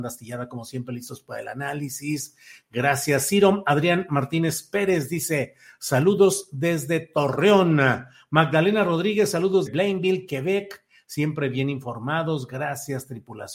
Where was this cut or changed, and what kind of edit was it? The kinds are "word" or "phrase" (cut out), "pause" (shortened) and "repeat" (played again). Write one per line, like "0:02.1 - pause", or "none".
0:09.7 - word